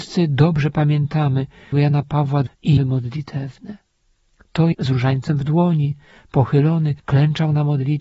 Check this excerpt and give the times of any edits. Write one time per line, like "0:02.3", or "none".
0:01.7
0:02.5
0:02.8
0:04.7
0:07.0

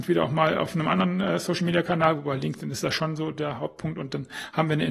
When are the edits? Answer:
none

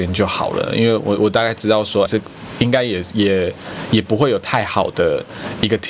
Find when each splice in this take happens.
0:02.1

